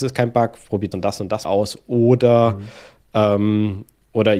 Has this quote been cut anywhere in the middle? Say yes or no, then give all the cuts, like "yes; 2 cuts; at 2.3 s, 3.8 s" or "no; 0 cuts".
yes; 2 cuts; at 0.9 s, 1.4 s